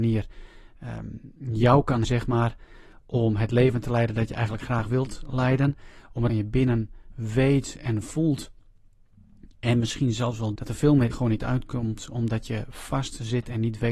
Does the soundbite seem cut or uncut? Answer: cut